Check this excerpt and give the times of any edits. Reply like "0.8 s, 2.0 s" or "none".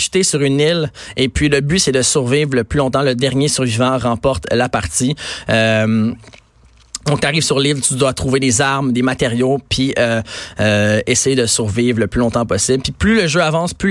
none